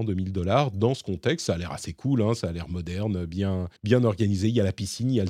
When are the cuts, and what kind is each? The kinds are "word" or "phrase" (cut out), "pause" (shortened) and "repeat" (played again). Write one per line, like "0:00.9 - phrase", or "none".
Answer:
0:03.8 - pause